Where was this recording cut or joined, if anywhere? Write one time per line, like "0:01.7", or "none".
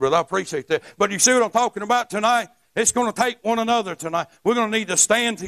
none